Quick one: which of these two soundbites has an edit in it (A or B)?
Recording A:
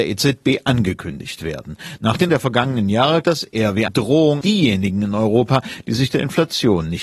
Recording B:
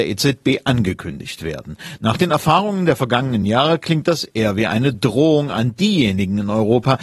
A